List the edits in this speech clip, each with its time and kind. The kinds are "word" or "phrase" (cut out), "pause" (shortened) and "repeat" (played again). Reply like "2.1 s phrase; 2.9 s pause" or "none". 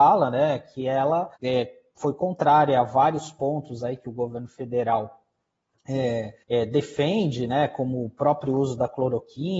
1.3 s pause; 6.4 s pause